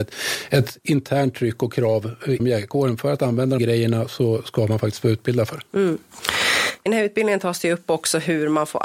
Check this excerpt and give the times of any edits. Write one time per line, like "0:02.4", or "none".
0:02.4
0:03.6
0:06.9